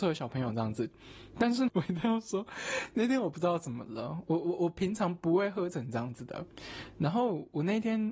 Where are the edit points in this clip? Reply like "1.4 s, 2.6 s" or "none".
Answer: 1.7 s